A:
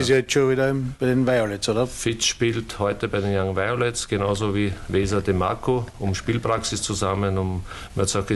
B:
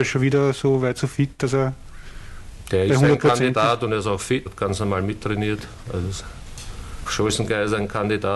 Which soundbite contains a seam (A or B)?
B